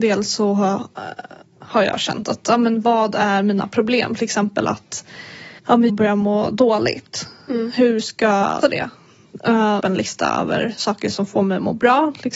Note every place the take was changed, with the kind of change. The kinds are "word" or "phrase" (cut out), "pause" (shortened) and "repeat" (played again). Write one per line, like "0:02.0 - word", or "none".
0:05.6 - pause
0:05.9 - phrase
0:08.6 - word
0:09.8 - phrase